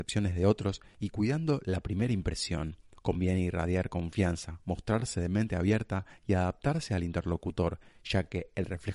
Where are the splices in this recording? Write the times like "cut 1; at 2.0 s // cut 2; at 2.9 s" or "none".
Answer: cut 1; at 2.9 s